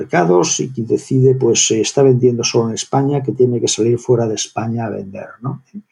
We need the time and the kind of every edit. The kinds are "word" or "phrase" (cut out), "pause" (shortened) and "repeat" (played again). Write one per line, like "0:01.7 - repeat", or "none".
none